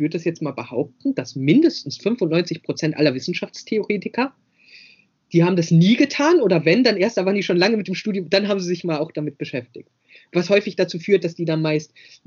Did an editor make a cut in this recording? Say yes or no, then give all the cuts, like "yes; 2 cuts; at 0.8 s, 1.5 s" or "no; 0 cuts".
no; 0 cuts